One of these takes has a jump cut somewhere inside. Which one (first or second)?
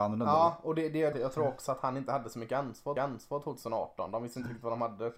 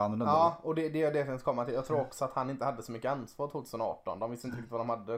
first